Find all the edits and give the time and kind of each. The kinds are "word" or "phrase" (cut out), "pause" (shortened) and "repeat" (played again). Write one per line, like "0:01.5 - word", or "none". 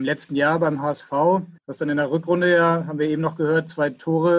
0:01.6 - pause